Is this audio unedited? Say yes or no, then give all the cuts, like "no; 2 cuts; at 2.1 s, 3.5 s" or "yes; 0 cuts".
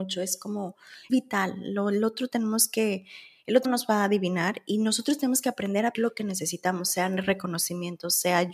no; 3 cuts; at 1.1 s, 3.6 s, 5.9 s